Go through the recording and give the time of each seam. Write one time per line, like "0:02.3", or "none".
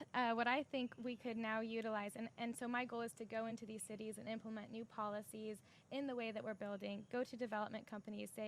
none